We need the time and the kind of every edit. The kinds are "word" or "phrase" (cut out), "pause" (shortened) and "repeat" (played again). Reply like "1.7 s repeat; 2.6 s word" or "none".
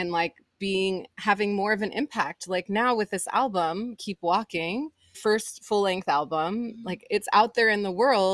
5.1 s phrase